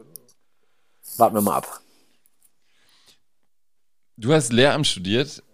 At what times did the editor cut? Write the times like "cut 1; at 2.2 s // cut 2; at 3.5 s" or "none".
none